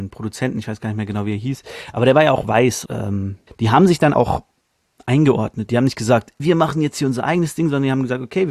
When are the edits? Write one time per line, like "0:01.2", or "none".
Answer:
0:02.9
0:03.5
0:04.1
0:06.4